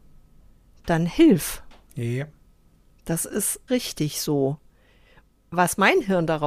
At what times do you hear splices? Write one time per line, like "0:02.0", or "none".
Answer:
0:03.7